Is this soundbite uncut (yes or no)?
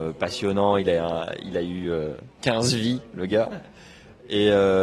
yes